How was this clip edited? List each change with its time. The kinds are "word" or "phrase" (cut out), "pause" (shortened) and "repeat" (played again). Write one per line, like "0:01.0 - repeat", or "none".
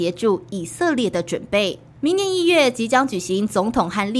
0:01.9 - pause